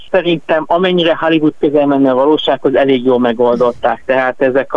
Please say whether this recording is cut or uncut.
uncut